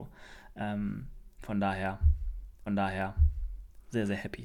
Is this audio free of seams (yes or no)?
no